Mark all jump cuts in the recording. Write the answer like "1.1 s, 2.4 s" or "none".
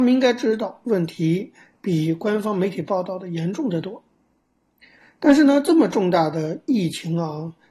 none